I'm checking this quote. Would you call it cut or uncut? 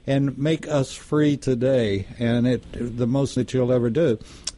cut